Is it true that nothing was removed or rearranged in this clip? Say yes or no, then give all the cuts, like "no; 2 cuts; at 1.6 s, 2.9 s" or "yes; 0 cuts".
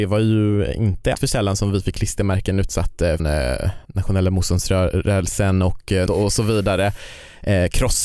no; 4 cuts; at 1.1 s, 3.2 s, 3.8 s, 6.1 s